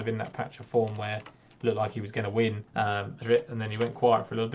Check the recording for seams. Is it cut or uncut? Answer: cut